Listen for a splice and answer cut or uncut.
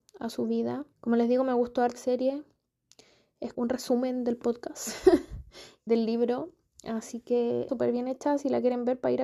cut